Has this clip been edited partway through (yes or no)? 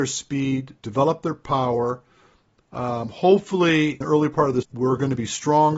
yes